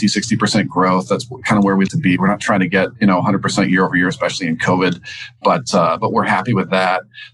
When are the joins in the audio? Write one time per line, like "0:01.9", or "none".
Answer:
0:01.9